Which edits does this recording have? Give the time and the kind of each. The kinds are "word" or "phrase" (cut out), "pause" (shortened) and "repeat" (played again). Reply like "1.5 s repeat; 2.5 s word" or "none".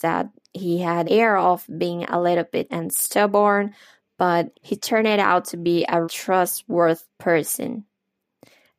1.0 s word; 2.7 s word; 4.5 s word; 6.0 s word